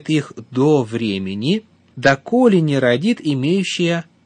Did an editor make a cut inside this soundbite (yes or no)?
no